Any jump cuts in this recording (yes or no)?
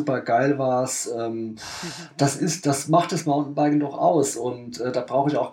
no